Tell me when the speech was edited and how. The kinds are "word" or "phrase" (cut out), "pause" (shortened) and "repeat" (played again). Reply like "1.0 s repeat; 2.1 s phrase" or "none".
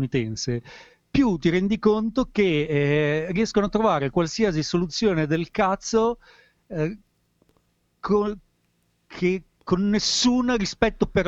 none